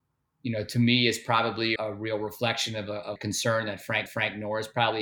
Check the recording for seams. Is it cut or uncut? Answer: cut